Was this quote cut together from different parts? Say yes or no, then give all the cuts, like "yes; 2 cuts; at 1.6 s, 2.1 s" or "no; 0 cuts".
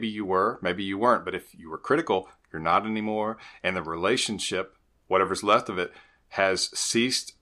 no; 0 cuts